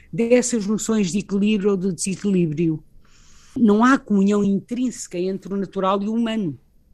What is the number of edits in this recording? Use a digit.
0